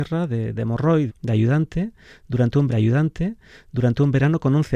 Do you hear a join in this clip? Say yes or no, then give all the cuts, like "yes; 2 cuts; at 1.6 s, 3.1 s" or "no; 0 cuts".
yes; 2 cuts; at 1.1 s, 2.7 s